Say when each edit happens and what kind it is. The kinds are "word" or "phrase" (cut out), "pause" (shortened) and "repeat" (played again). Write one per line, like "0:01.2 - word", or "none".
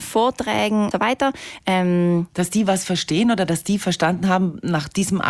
0:00.9 - word